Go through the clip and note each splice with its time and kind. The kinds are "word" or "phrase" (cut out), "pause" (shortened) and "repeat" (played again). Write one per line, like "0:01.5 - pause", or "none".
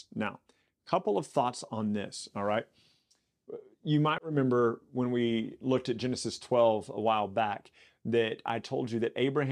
none